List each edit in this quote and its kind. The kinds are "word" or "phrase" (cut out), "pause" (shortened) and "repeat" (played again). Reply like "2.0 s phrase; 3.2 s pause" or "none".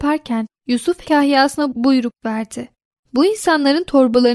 1.0 s word